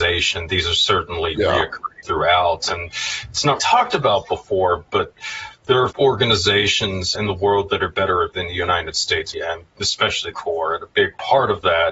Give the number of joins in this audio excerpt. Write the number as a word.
seven